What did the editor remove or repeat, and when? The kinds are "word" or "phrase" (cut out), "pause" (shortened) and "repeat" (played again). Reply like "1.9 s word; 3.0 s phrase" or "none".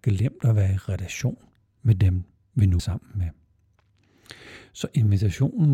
2.8 s word